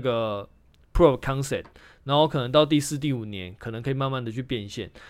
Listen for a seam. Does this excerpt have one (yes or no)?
no